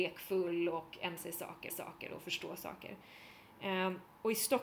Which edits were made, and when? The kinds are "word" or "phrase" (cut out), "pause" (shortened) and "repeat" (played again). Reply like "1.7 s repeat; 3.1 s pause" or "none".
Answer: 1.2 s word; 1.7 s repeat